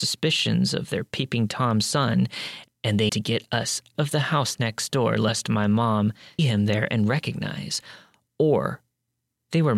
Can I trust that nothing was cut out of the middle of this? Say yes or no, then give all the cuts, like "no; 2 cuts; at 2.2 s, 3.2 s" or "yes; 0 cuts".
no; 3 cuts; at 3.1 s, 3.9 s, 6.4 s